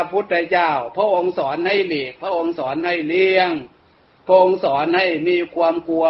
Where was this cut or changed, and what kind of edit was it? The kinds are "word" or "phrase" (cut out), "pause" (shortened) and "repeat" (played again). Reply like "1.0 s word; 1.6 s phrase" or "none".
none